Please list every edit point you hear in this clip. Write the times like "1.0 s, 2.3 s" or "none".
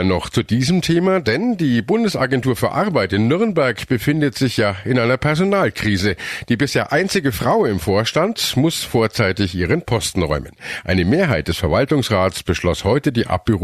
none